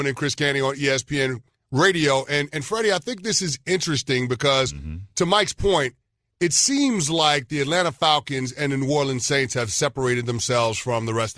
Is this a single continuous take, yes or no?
yes